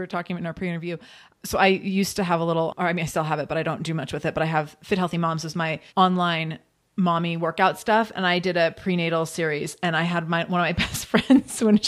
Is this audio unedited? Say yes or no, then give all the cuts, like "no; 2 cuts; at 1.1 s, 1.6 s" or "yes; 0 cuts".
no; 1 cut; at 5.9 s